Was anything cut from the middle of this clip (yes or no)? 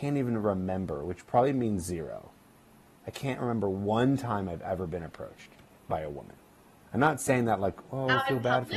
no